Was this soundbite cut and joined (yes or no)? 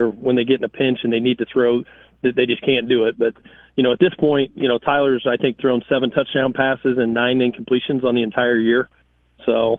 no